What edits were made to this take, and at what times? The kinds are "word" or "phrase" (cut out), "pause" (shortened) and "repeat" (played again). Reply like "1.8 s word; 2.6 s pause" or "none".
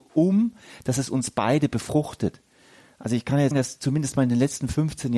3.5 s word